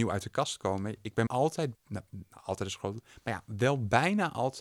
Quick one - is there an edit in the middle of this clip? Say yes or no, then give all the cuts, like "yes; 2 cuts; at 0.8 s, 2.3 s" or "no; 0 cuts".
yes; 2 cuts; at 1.3 s, 1.7 s